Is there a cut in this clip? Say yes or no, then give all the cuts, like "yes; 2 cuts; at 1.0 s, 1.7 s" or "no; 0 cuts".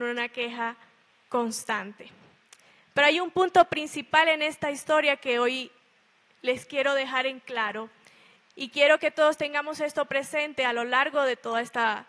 no; 0 cuts